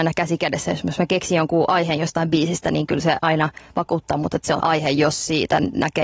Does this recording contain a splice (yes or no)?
yes